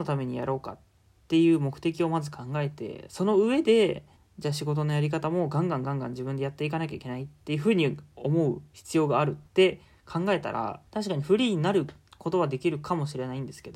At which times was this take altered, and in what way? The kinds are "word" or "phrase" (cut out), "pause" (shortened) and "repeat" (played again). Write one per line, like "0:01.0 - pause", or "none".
0:04.2 - pause
0:09.5 - pause
0:10.9 - pause